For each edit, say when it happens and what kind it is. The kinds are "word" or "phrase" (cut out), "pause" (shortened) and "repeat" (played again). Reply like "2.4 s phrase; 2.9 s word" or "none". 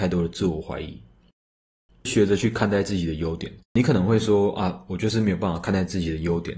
3.6 s pause